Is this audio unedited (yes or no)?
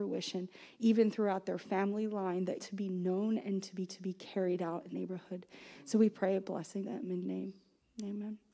no